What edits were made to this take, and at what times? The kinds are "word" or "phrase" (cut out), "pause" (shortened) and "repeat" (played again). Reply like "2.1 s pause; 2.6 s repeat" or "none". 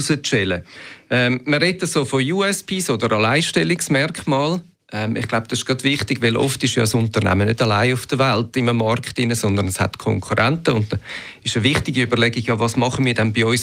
none

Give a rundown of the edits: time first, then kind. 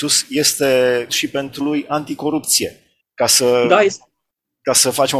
1.1 s word; 1.6 s word; 3.0 s pause

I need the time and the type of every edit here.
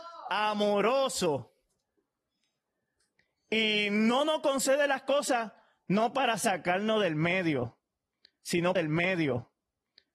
8.8 s repeat

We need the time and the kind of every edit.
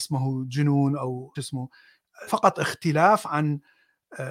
1.3 s word; 2.3 s word

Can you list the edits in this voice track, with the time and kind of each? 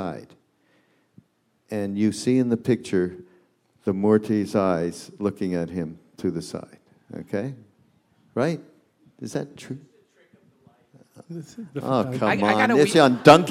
none

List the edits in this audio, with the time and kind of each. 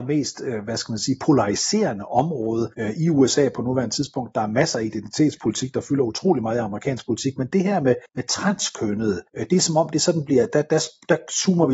2.7 s pause; 8.1 s pause; 9.3 s pause

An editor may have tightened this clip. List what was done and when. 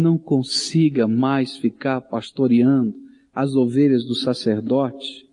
none

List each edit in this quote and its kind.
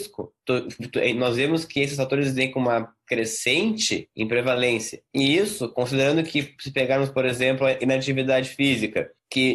none

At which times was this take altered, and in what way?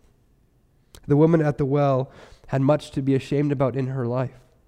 none

